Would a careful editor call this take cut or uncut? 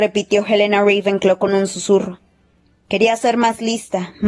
uncut